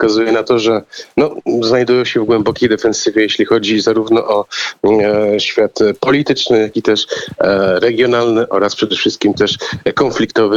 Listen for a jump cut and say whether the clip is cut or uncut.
uncut